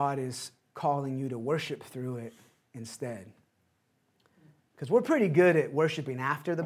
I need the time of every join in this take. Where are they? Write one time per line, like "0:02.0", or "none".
none